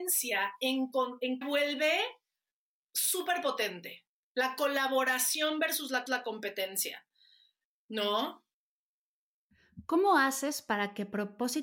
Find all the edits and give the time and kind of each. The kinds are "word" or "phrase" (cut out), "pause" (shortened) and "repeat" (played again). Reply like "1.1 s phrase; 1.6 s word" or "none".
1.4 s phrase; 6.1 s repeat